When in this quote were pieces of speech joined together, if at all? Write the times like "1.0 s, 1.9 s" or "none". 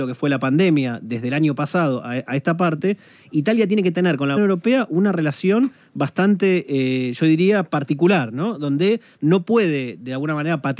4.4 s